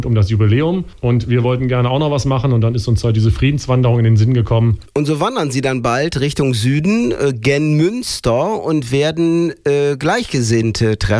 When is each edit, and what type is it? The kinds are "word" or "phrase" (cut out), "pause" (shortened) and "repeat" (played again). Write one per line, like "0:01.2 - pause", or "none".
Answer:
none